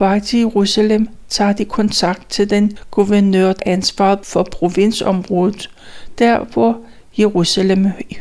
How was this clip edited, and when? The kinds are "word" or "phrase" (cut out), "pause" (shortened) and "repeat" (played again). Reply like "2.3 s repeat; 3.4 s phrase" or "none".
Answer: 3.6 s word